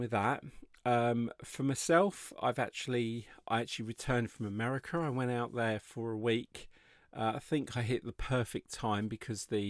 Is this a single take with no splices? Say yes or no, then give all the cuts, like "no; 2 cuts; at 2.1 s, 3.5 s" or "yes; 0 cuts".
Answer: yes; 0 cuts